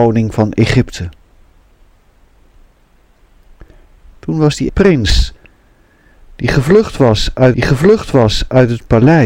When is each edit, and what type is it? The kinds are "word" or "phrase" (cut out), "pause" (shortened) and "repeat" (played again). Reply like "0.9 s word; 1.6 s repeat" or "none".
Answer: 4.7 s word; 7.5 s repeat